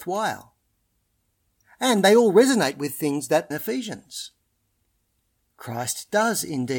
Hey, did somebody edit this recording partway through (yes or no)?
yes